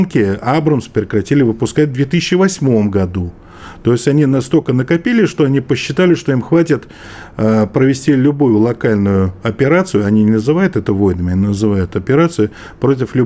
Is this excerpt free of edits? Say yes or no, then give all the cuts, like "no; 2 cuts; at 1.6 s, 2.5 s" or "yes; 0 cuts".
yes; 0 cuts